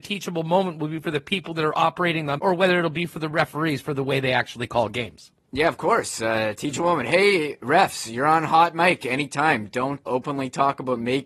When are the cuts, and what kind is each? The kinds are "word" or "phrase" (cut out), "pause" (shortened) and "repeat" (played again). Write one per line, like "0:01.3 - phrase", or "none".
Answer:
0:02.4 - word
0:10.1 - word